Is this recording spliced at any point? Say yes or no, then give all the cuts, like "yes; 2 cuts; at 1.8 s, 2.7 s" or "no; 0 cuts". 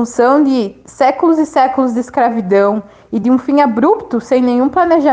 no; 0 cuts